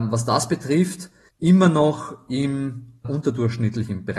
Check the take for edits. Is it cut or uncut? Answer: cut